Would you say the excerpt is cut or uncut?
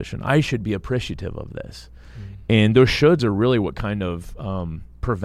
uncut